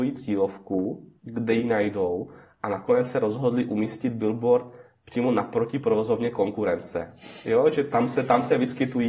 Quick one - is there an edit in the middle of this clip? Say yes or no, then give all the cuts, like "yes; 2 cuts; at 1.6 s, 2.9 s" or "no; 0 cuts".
yes; 1 cut; at 1.2 s